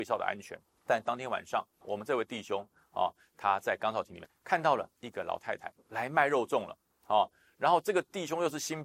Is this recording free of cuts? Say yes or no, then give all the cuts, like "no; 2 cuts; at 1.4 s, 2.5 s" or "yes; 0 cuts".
no; 1 cut; at 4.9 s